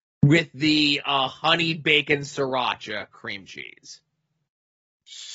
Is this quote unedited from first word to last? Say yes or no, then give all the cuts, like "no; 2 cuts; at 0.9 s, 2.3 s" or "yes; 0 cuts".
yes; 0 cuts